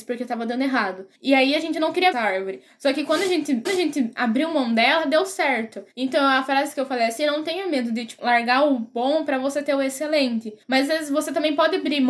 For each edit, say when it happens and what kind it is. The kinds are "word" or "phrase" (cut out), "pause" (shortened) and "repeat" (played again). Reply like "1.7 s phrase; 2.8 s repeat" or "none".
1.1 s pause; 2.1 s phrase; 3.7 s repeat; 5.9 s pause; 8.2 s word; 10.6 s pause

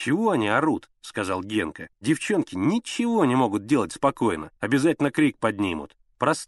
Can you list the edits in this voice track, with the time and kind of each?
1.9 s pause; 4.6 s pause

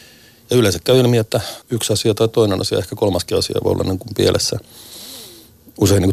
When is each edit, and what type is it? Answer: 1.6 s pause

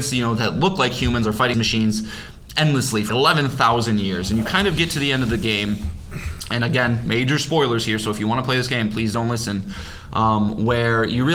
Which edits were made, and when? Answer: 1.5 s word; 3.1 s word

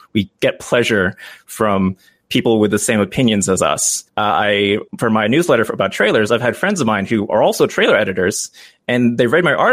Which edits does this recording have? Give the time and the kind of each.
4.1 s pause; 4.9 s pause

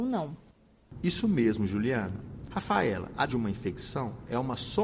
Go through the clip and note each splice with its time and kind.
3.3 s word

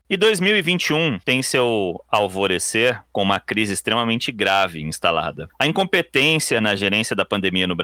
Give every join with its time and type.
none

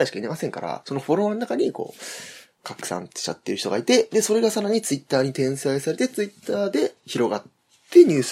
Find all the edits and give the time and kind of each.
2.6 s word

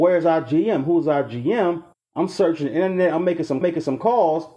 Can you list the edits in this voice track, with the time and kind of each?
1.9 s pause; 3.6 s repeat

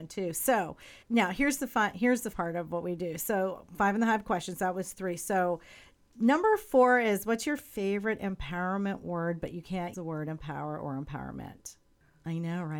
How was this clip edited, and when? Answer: 1.0 s pause; 2.3 s word; 9.9 s word

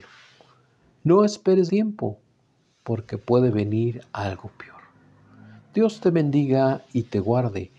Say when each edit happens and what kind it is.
1.7 s word

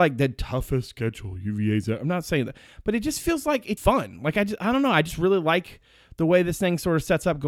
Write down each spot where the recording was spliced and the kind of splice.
3.8 s word

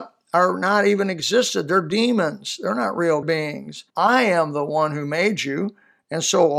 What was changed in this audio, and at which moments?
3.2 s phrase; 3.9 s pause

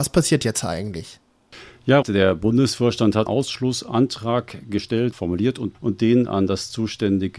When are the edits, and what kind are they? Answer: 2.0 s word; 3.3 s word; 5.1 s word; 5.7 s word

